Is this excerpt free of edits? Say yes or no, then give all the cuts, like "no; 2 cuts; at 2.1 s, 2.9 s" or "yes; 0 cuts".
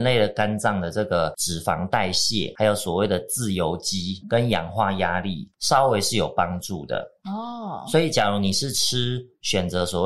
no; 1 cut; at 4.2 s